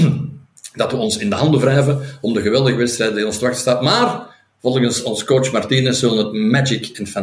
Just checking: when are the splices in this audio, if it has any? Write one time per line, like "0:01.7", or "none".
none